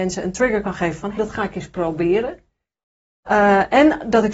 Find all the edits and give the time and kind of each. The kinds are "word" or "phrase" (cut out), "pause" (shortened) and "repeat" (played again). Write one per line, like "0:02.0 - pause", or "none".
0:01.2 - word

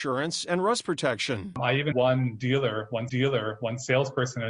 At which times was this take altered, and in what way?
0:01.9 - word
0:03.1 - repeat

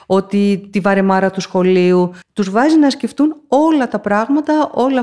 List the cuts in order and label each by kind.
0:02.2 - pause

